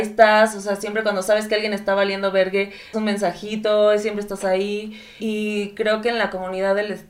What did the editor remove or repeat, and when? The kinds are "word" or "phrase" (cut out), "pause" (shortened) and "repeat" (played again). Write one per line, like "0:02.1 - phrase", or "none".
0:02.9 - word
0:05.2 - word